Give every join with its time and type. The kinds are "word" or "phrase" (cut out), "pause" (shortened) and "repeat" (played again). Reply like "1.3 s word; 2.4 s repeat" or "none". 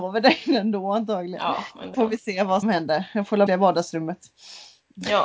1.9 s word; 2.6 s word; 3.5 s phrase